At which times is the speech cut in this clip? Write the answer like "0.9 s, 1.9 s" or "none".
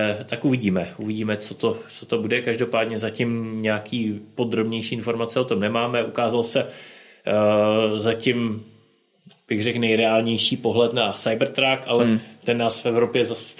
none